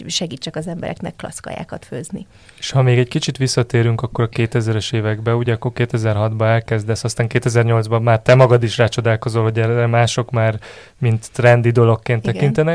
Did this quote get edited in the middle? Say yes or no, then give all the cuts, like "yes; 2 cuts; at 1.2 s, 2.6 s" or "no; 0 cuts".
no; 0 cuts